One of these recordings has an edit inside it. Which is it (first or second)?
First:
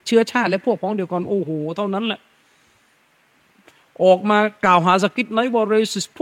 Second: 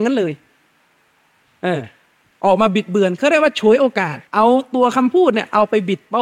second